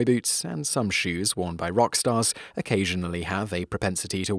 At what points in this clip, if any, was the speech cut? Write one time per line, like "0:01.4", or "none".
0:02.5